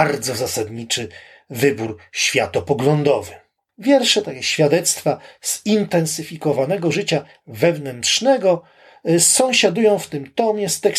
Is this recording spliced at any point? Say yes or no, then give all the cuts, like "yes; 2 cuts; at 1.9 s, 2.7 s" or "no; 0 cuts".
no; 0 cuts